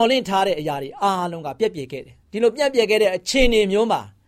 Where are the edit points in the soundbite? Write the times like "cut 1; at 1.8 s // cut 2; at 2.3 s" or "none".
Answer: cut 1; at 2.2 s